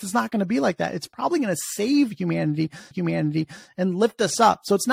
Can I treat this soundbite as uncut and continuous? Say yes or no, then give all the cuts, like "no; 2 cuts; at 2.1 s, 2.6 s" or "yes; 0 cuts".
no; 1 cut; at 2.9 s